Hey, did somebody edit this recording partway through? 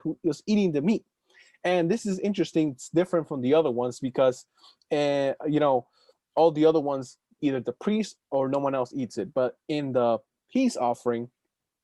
no; 0 cuts

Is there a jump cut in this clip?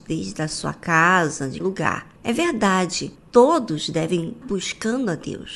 yes; 4 cuts; at 1.6 s, 2.2 s, 3.2 s, 4.4 s

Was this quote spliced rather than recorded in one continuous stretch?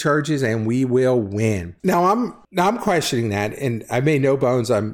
no; 0 cuts

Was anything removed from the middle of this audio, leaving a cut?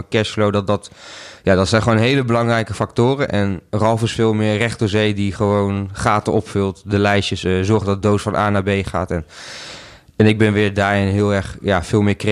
no; 0 cuts

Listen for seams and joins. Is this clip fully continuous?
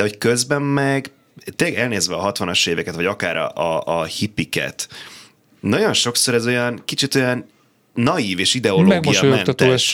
yes; 0 cuts

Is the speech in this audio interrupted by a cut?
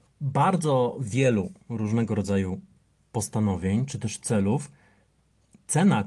no; 0 cuts

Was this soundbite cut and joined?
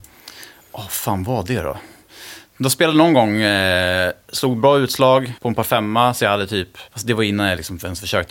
yes; 2 cuts; at 5.4 s, 6.9 s

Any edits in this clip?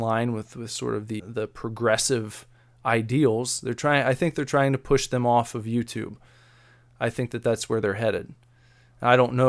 yes; 1 cut; at 1.2 s

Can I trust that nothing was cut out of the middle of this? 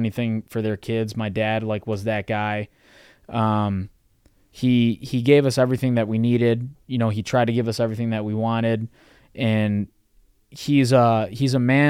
yes; 0 cuts

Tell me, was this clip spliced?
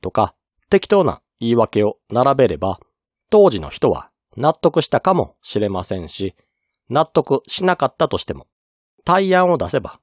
no; 0 cuts

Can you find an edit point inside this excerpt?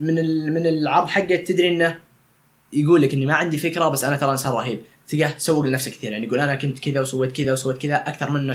no; 0 cuts

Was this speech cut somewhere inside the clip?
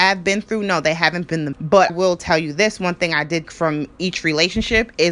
yes; 3 cuts; at 1.5 s, 1.9 s, 3.4 s

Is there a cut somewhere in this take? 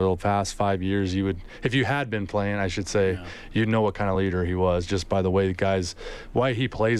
no; 0 cuts

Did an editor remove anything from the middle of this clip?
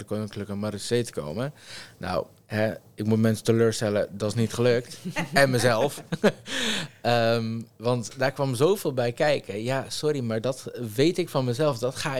no; 0 cuts

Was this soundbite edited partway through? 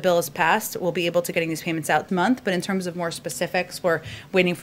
yes; 2 cuts; at 1.3 s, 2.1 s

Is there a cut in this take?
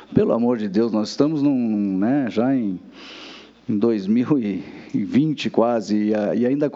no; 0 cuts

